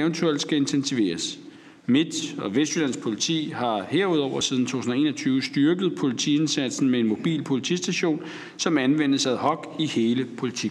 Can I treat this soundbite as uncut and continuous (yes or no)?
yes